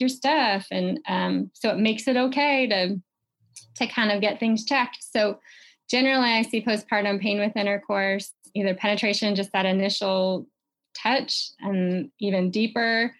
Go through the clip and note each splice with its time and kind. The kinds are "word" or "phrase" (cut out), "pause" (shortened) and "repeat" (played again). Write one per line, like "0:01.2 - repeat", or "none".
none